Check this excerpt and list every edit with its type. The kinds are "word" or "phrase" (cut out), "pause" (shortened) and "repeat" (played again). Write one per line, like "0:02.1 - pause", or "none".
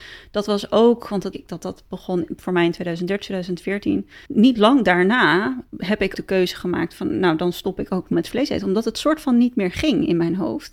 0:01.3 - word
0:04.3 - pause
0:06.1 - word
0:08.1 - word